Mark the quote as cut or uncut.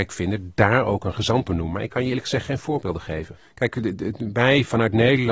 cut